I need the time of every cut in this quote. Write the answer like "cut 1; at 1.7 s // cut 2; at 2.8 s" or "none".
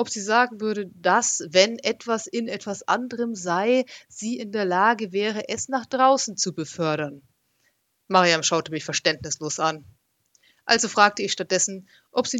none